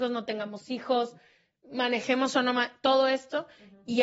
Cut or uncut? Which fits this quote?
uncut